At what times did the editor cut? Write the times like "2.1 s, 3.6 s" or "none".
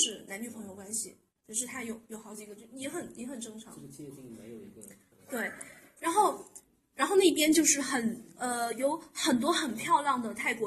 6.7 s